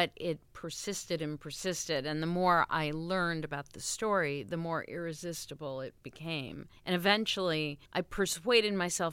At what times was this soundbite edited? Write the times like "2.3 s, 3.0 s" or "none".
6.8 s, 7.9 s